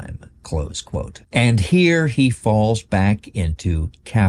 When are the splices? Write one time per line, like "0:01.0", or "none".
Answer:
0:01.2